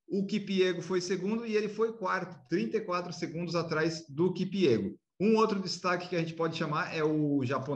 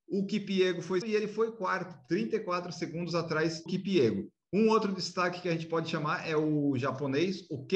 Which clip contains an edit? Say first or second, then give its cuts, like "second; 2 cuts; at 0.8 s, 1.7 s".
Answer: second; 2 cuts; at 1.0 s, 3.7 s